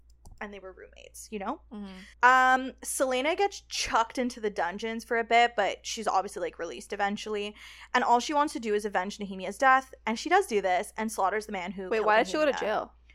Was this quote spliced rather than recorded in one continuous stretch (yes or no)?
yes